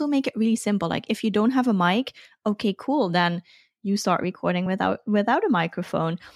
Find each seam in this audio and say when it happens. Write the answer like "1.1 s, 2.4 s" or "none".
none